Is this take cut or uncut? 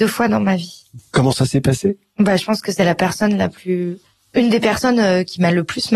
uncut